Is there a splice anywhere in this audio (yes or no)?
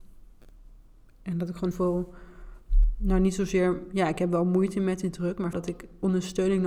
yes